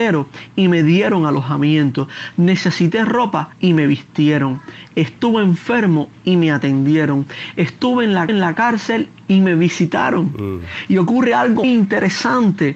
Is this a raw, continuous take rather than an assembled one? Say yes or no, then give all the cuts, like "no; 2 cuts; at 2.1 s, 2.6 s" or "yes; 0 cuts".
no; 3 cuts; at 3.5 s, 8.3 s, 11.6 s